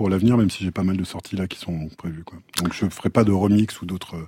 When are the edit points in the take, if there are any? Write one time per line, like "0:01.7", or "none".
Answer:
none